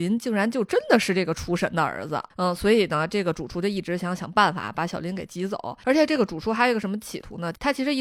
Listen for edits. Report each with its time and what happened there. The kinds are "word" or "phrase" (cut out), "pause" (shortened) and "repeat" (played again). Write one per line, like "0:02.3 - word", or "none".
0:02.3 - pause